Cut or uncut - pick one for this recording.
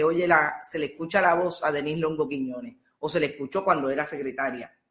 uncut